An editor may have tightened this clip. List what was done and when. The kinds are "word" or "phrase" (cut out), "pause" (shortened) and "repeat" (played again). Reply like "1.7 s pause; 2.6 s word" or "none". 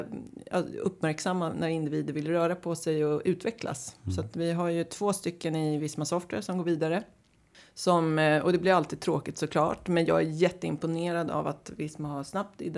none